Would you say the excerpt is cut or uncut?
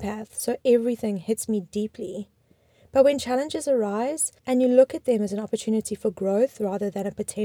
cut